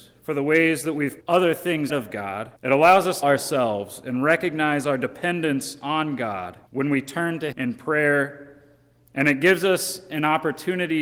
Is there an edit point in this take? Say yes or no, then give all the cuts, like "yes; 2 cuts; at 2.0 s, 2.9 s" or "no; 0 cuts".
yes; 6 cuts; at 1.2 s, 1.9 s, 2.6 s, 3.2 s, 6.7 s, 7.5 s